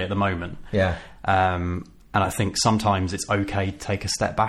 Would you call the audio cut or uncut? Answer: uncut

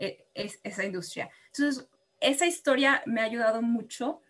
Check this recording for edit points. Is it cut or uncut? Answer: cut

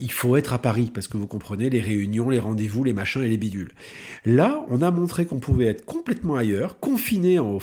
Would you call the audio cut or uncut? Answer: uncut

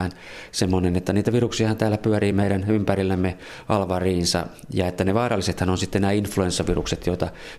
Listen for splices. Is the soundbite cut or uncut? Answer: uncut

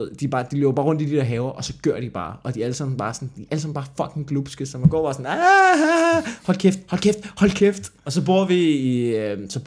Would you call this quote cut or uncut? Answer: cut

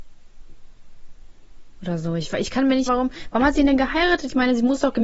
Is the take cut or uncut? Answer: cut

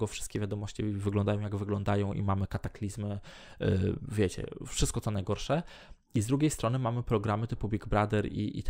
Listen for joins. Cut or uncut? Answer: uncut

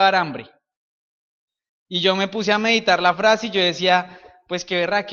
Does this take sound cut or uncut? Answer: uncut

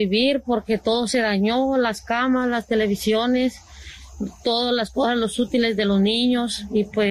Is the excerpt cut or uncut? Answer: uncut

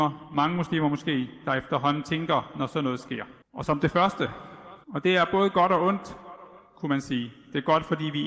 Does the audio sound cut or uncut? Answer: cut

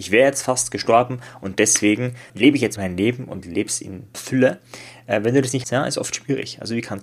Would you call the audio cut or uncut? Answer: cut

